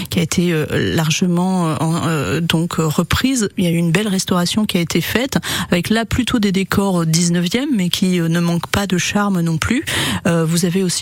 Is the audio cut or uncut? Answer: uncut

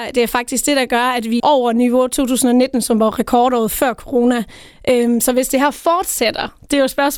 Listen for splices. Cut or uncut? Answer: cut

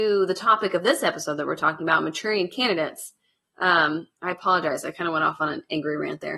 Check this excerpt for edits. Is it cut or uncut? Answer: uncut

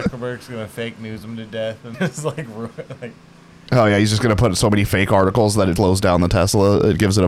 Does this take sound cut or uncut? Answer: cut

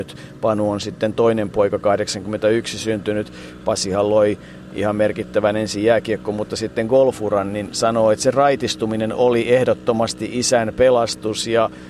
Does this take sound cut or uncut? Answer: uncut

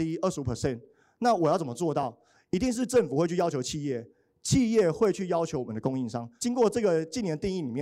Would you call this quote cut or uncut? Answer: uncut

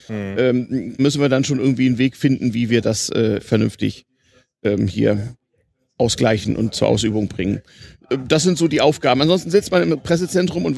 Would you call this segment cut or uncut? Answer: cut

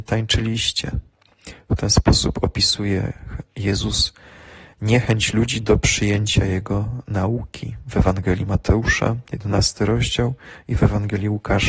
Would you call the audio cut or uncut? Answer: uncut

